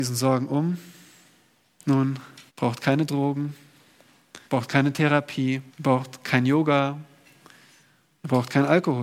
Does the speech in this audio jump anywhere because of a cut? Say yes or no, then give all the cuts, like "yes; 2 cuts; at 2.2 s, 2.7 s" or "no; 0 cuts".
yes; 3 cuts; at 2.5 s, 4.4 s, 5.7 s